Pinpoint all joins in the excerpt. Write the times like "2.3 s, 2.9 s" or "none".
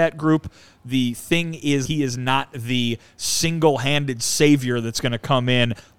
1.9 s